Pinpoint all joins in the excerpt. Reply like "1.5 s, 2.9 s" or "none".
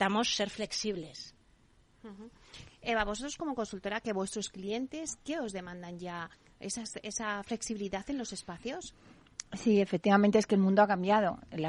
none